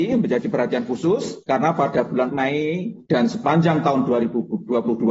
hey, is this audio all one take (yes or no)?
no